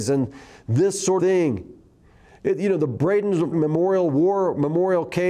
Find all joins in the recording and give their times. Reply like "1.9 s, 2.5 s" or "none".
1.2 s, 3.5 s